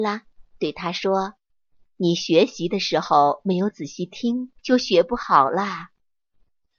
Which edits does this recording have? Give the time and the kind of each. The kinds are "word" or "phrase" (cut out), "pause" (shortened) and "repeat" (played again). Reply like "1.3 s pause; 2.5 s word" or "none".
1.5 s pause; 4.6 s pause